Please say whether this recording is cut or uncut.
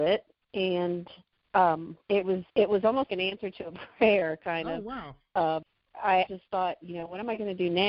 cut